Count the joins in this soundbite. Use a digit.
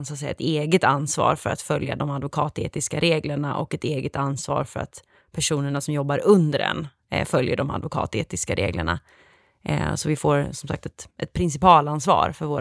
0